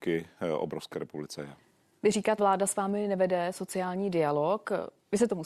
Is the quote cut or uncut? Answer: cut